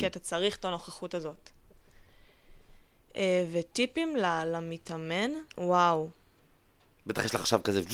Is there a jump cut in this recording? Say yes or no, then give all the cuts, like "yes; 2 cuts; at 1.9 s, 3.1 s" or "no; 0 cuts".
yes; 1 cut; at 5.5 s